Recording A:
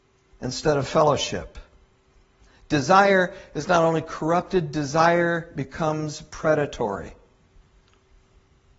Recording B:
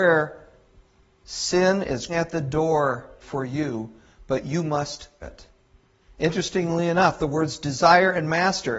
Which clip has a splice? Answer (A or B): B